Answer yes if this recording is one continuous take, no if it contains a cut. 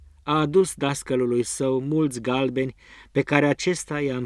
yes